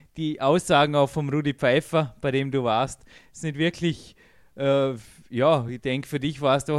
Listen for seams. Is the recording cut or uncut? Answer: uncut